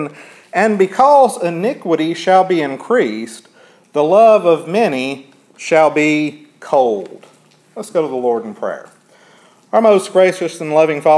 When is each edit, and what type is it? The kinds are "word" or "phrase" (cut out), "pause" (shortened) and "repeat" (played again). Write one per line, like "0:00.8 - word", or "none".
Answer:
none